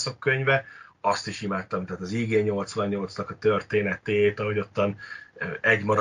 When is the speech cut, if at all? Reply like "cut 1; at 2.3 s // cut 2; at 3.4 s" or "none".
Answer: none